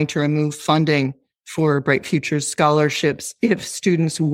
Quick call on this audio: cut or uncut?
uncut